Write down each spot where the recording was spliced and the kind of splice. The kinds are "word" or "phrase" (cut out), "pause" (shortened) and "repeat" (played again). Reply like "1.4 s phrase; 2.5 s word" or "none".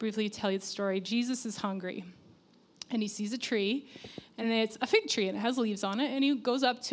none